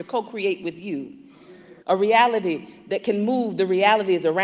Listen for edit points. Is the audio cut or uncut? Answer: cut